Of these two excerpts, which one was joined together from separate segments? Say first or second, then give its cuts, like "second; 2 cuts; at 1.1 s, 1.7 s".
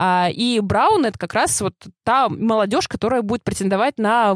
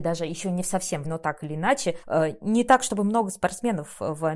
second; 2 cuts; at 1.0 s, 2.0 s